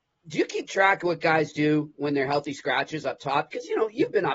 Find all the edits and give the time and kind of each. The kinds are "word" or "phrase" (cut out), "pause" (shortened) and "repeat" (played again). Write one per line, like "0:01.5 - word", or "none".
none